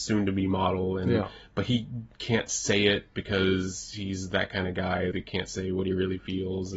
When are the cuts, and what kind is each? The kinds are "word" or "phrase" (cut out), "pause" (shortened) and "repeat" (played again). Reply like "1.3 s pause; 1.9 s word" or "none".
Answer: 5.1 s word